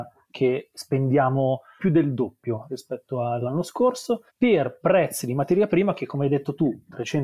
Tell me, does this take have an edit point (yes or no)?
yes